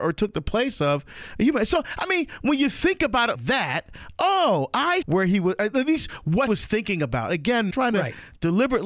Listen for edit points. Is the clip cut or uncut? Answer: cut